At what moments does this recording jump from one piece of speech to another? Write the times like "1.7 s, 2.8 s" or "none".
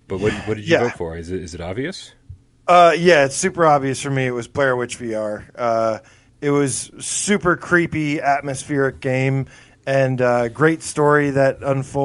none

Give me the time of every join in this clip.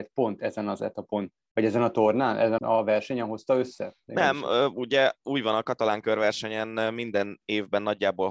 2.6 s

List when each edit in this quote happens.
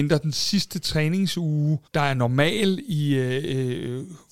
1.9 s

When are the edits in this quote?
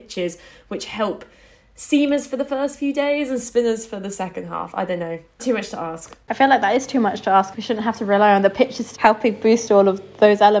5.4 s, 7.5 s, 8.9 s

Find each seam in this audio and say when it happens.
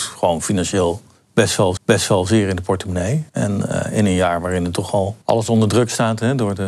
1.8 s, 3.3 s, 5.2 s

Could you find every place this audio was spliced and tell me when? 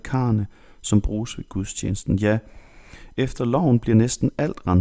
none

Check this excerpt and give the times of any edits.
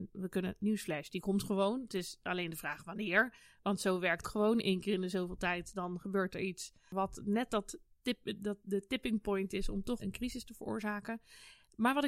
4.2 s, 10.0 s

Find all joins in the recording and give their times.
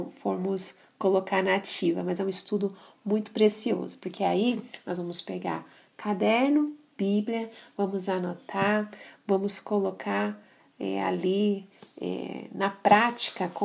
none

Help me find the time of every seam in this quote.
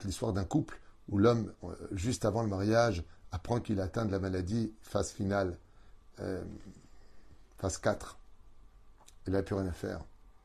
none

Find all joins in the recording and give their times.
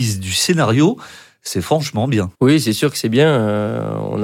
2.3 s

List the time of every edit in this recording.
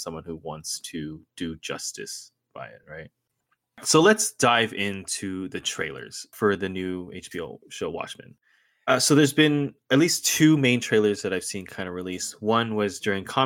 none

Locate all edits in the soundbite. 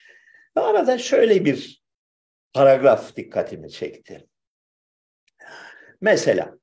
none

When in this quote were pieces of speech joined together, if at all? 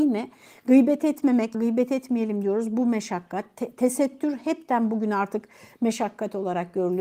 1.5 s

